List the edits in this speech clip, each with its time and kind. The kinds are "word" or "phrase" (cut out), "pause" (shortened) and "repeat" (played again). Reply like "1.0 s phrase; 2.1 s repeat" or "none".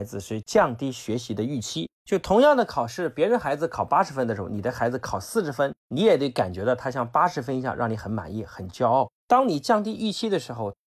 1.9 s pause; 5.8 s pause; 9.2 s pause